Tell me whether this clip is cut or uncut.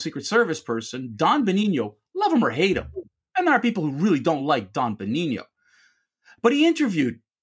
uncut